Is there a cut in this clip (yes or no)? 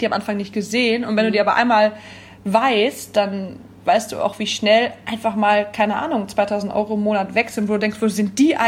no